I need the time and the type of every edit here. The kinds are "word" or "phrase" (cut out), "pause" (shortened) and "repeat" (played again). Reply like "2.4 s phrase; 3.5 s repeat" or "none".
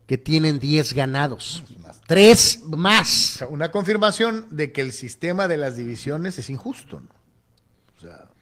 none